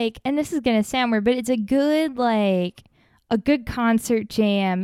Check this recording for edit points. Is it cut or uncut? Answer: uncut